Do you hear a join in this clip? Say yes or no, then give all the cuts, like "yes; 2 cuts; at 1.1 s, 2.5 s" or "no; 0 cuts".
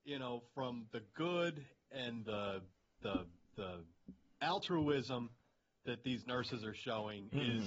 no; 0 cuts